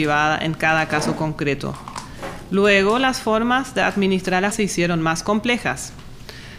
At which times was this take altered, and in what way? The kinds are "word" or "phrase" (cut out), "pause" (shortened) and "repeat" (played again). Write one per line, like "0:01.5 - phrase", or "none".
0:04.5 - word